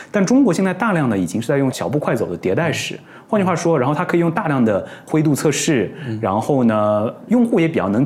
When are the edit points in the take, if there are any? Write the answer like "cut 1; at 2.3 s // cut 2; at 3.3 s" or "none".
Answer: none